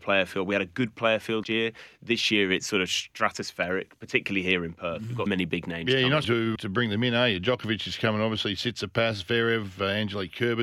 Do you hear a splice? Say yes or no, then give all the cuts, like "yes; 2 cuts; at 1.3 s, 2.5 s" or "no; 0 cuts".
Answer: yes; 4 cuts; at 1.4 s, 5.3 s, 6.2 s, 6.6 s